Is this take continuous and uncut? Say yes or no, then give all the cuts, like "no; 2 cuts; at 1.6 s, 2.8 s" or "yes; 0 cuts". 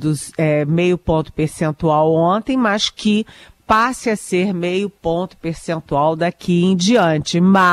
yes; 0 cuts